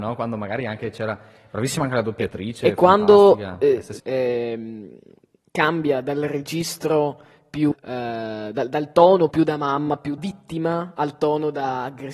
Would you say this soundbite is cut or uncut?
cut